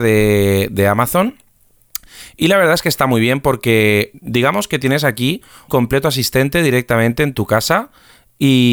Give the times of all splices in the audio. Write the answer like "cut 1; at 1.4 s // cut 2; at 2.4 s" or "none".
cut 1; at 4.1 s // cut 2; at 5.7 s